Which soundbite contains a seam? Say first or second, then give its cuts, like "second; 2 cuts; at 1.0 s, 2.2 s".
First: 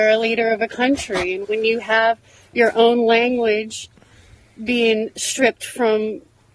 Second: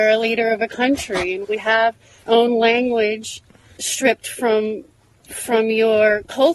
second; 3 cuts; at 1.6 s, 2.3 s, 3.8 s